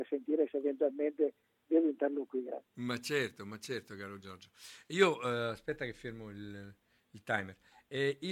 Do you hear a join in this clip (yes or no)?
no